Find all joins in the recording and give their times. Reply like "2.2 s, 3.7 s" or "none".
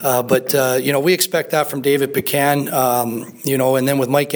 none